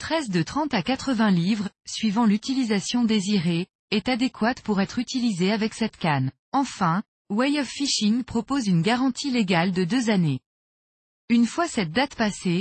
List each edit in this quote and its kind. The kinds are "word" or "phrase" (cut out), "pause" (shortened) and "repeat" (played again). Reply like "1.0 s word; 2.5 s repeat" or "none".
6.4 s pause